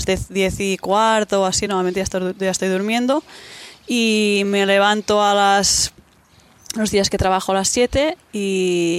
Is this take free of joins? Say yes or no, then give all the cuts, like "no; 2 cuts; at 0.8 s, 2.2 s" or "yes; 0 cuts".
yes; 0 cuts